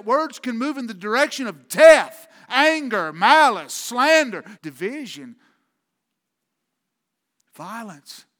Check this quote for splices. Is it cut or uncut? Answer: cut